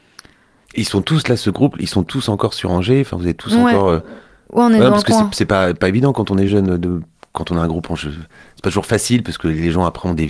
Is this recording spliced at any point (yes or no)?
no